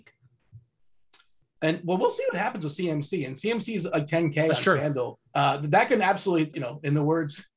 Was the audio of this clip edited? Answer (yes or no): yes